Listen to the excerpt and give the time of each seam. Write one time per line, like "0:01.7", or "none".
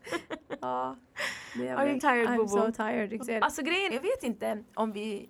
0:02.0
0:03.2
0:03.9